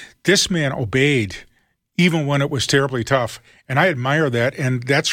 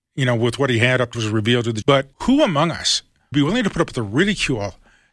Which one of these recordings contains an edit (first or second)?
second